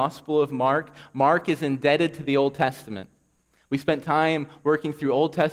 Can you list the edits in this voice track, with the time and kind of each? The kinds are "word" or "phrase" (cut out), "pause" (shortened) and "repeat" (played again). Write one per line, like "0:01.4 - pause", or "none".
none